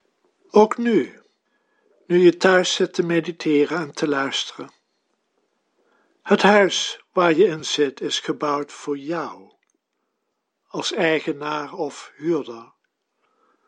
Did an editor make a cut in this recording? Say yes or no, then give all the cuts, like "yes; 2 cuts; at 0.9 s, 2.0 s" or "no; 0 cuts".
no; 0 cuts